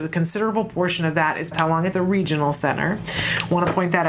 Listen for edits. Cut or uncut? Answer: cut